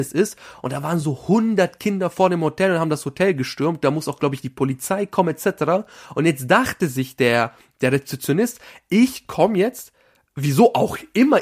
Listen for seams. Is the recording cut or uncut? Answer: uncut